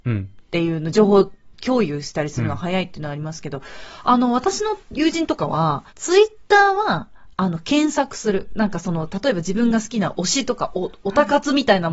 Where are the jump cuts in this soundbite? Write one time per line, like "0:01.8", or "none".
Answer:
0:04.8
0:05.9